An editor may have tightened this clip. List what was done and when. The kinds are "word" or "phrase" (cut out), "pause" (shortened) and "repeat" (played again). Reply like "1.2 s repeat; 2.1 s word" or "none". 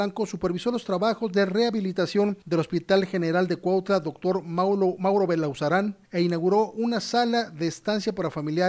2.4 s pause; 6.0 s pause